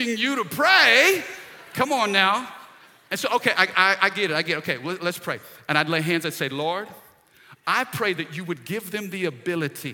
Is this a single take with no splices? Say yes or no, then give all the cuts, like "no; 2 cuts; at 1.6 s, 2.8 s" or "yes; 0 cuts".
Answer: yes; 0 cuts